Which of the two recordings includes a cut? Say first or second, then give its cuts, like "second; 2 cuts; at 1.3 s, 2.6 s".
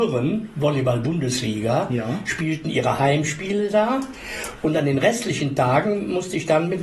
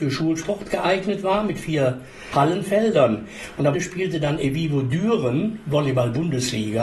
second; 1 cut; at 3.7 s